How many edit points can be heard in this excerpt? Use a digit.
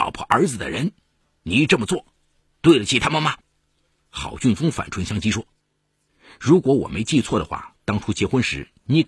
1